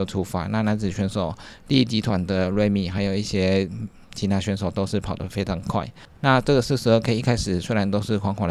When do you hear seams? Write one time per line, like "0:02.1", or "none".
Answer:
none

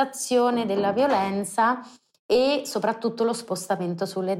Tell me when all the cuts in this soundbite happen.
none

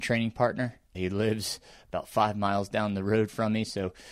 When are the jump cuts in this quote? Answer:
0:00.9

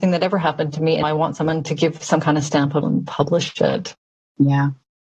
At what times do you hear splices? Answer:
0:01.0
0:02.8

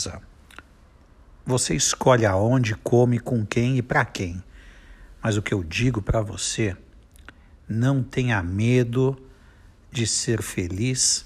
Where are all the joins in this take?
none

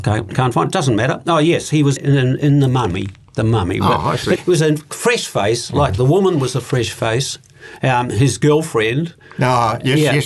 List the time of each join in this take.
0:02.0
0:04.4

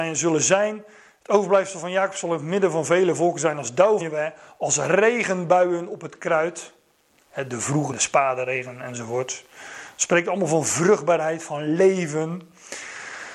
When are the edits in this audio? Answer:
0:04.0
0:07.9

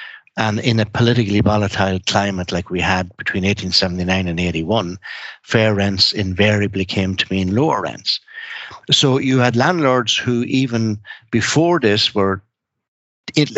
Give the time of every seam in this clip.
none

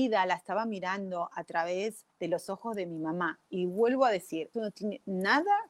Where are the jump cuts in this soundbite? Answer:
0:02.1
0:04.5

